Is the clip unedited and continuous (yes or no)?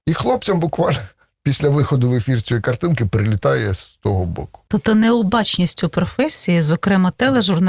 yes